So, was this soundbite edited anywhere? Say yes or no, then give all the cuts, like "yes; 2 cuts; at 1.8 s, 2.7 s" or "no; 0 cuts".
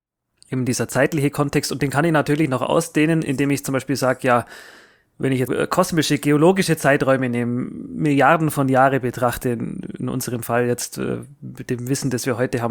yes; 1 cut; at 5.5 s